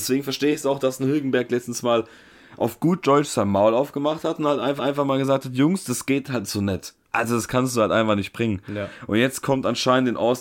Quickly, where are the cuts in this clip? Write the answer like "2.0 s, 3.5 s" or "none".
4.8 s, 7.0 s

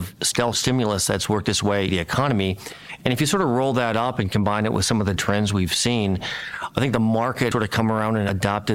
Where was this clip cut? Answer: 1.9 s, 5.2 s, 7.5 s

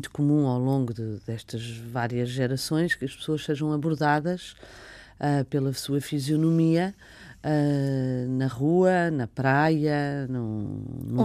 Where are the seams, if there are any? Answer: none

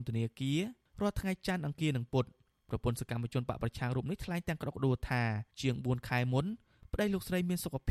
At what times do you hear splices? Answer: 5.5 s

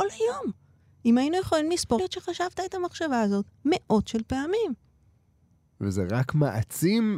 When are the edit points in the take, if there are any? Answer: 2.0 s

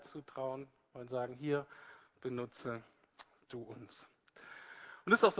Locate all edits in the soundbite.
none

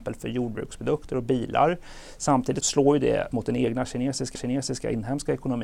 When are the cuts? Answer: 2.6 s, 3.3 s, 4.4 s

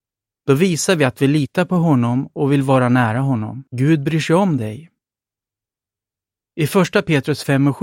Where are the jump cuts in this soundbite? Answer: 3.7 s

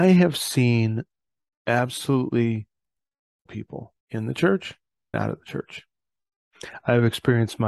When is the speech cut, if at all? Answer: 3.5 s, 4.0 s, 5.1 s

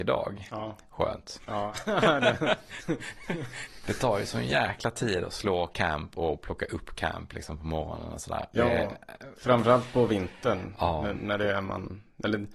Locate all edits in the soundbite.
none

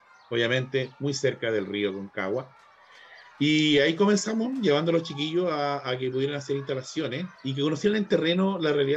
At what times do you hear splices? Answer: none

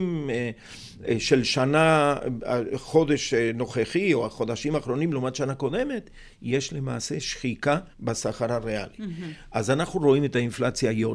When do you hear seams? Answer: 7.9 s

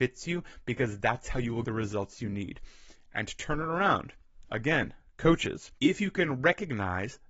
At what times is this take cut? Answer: 1.6 s, 5.8 s

